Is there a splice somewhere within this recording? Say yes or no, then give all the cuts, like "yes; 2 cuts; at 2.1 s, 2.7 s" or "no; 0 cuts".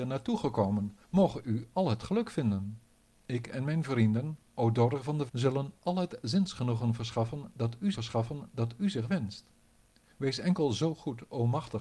yes; 5 cuts; at 1.0 s, 3.1 s, 5.3 s, 7.9 s, 9.8 s